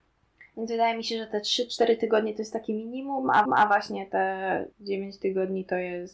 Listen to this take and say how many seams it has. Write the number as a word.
two